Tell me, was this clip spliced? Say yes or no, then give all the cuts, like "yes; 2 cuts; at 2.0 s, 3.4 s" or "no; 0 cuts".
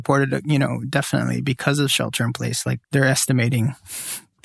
yes; 1 cut; at 2.8 s